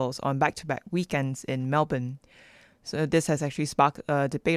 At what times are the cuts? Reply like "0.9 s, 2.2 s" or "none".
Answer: none